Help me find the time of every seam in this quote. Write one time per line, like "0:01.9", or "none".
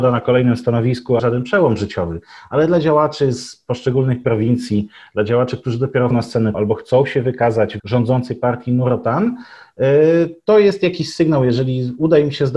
0:01.2
0:06.1
0:06.5
0:07.8